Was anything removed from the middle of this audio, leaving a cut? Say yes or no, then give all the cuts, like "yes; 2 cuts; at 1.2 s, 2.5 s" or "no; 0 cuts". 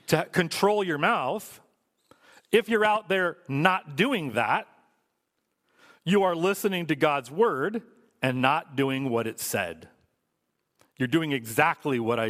no; 0 cuts